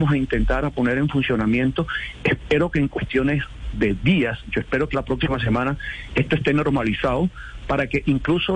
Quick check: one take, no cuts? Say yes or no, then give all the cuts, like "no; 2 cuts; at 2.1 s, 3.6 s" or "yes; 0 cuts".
no; 1 cut; at 4.9 s